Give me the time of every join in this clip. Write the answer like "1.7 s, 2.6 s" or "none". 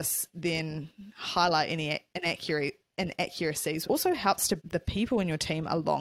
3.8 s, 4.6 s